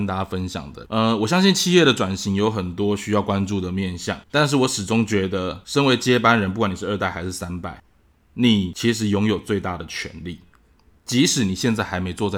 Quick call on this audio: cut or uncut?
cut